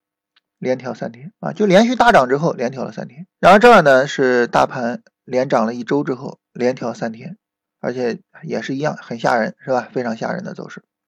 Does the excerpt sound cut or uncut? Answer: cut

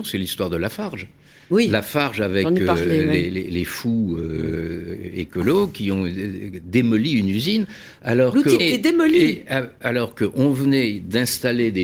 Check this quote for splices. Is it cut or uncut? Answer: cut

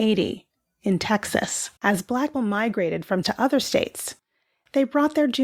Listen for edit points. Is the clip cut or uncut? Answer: cut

